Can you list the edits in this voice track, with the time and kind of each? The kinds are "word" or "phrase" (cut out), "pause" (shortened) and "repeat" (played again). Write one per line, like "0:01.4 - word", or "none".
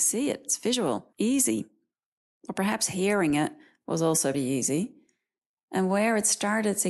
0:01.1 - pause
0:04.3 - word